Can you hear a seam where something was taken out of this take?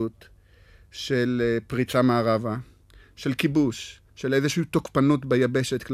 yes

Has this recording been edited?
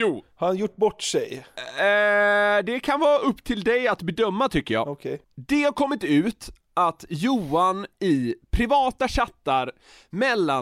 no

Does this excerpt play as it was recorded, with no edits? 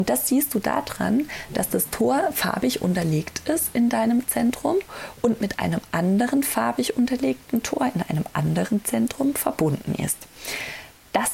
yes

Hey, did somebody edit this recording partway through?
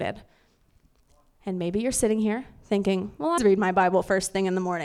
yes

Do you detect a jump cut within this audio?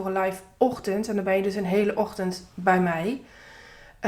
no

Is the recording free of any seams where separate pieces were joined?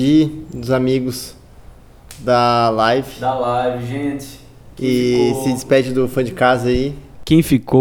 yes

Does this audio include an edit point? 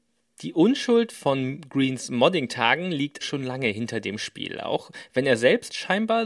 yes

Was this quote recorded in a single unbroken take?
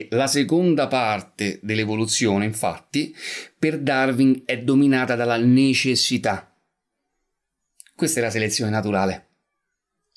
yes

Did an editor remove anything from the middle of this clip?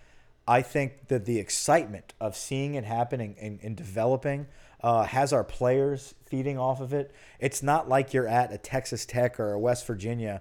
no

